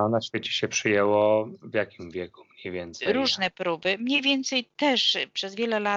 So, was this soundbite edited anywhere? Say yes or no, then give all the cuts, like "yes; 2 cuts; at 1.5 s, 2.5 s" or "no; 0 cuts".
no; 0 cuts